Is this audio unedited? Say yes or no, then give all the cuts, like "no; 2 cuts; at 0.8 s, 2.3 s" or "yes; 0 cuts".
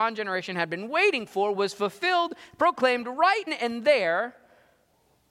no; 1 cut; at 3.5 s